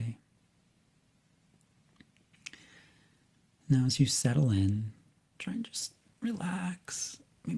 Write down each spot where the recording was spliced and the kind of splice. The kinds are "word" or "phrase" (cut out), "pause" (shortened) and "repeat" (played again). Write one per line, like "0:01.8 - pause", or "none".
none